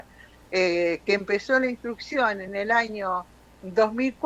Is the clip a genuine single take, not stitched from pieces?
yes; 0 cuts

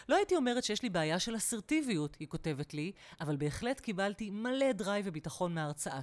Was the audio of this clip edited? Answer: no; 0 cuts

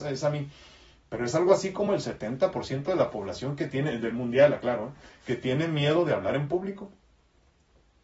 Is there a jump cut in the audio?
no; 0 cuts

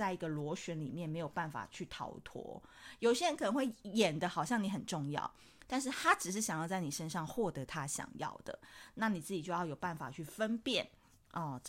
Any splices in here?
no; 0 cuts

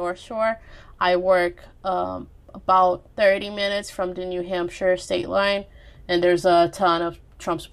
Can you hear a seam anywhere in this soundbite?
yes; 1 cut; at 3.1 s

